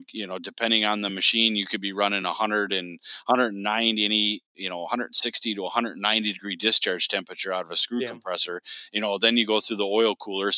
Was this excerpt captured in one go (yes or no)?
yes